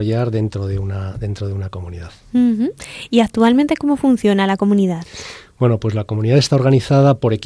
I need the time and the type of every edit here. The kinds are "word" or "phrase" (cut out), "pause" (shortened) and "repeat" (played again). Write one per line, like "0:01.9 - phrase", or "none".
none